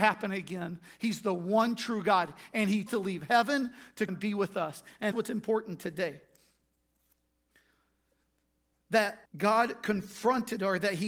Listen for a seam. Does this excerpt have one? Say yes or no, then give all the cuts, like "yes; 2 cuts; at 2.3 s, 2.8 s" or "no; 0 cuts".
yes; 4 cuts; at 2.9 s, 4.1 s, 5.1 s, 9.3 s